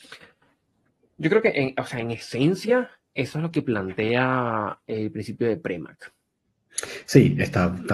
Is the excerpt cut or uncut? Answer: uncut